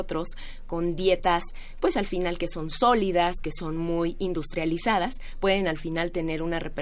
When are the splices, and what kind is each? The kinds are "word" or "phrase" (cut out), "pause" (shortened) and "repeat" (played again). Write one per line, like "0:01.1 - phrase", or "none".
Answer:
none

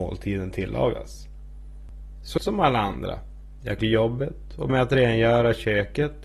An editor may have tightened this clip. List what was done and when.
0:02.4 - phrase
0:03.8 - word
0:04.7 - word

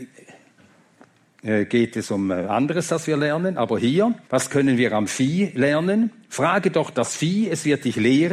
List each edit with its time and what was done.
0:04.2 - pause

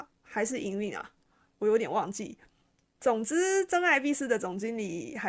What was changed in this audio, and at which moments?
none

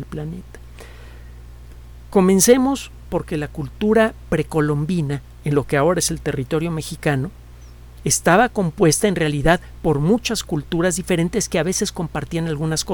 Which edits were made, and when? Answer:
none

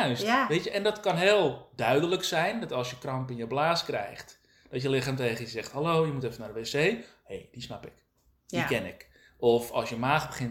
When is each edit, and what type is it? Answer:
none

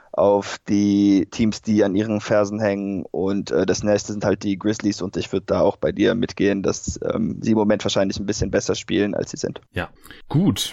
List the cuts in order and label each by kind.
none

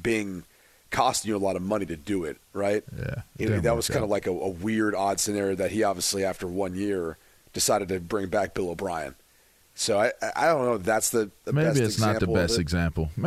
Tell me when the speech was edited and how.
none

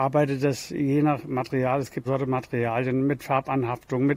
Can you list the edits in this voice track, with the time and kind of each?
0:02.0 - phrase

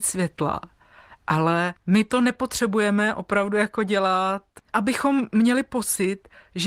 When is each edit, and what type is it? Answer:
0:04.7 - pause

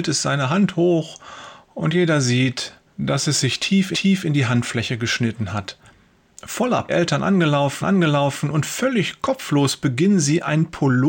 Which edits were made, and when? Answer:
0:03.9 - repeat
0:06.9 - phrase
0:07.8 - repeat

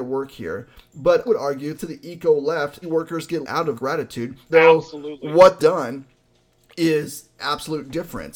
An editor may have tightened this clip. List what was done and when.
0:01.3 - word
0:01.8 - word
0:02.8 - word
0:03.4 - word
0:03.8 - word
0:04.5 - word
0:05.6 - word
0:07.4 - word

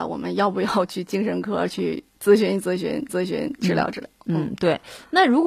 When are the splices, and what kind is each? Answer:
0:03.1 - repeat

